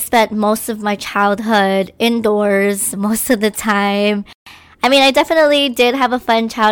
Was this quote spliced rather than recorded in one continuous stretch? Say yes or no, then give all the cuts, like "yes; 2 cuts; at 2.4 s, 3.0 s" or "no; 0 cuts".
no; 0 cuts